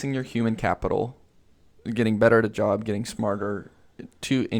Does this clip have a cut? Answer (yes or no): no